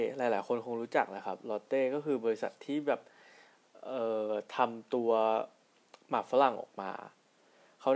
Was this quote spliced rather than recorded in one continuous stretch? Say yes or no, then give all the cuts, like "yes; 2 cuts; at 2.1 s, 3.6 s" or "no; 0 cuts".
no; 0 cuts